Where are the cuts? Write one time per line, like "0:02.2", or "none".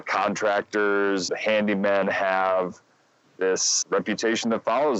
0:01.3
0:03.8